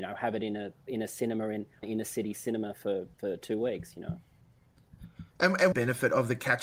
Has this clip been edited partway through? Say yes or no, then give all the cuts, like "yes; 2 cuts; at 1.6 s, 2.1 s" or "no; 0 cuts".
yes; 4 cuts; at 1.8 s, 3.1 s, 5.3 s, 5.7 s